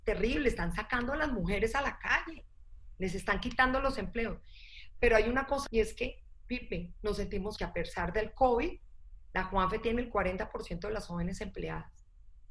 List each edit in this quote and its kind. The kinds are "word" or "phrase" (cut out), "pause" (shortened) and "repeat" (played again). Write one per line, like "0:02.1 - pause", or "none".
0:05.7 - word
0:07.6 - word